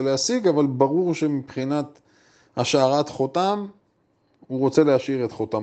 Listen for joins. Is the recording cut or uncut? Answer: uncut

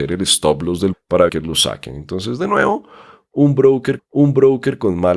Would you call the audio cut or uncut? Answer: cut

